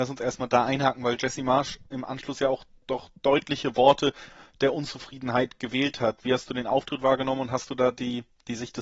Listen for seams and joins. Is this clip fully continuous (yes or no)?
yes